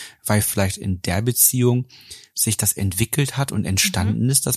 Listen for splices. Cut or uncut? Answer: uncut